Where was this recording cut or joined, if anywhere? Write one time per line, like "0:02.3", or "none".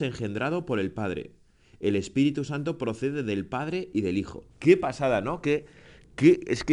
0:04.5